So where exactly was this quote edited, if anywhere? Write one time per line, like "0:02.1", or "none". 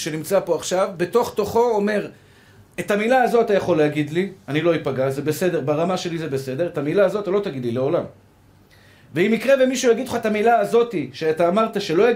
none